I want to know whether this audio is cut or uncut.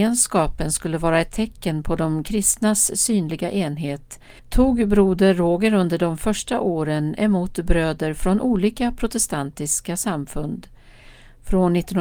cut